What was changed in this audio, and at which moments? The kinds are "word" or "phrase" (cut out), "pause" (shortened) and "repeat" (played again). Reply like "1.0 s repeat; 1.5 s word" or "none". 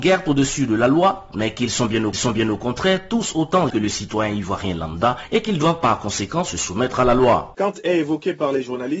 2.1 s repeat; 3.7 s word

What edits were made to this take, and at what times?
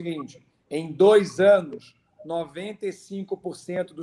none

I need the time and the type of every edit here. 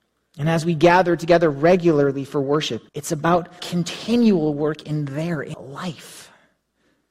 2.9 s pause; 3.6 s word; 5.5 s word

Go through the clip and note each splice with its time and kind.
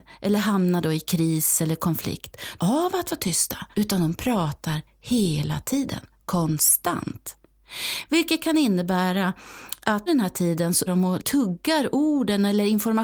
2.6 s phrase; 3.7 s pause; 10.1 s word; 10.9 s word; 11.2 s word

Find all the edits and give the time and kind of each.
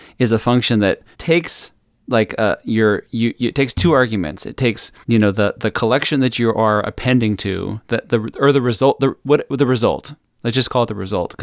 1.1 s pause; 5.0 s pause

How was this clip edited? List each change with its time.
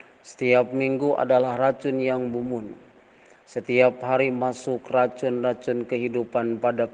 none

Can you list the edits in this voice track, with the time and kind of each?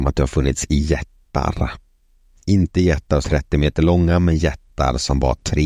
3.2 s word

